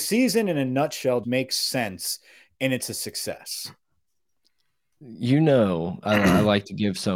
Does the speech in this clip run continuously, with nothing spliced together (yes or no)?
no